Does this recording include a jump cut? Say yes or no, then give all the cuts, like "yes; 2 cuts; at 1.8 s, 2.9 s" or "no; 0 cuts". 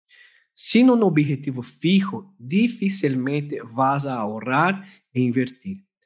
no; 0 cuts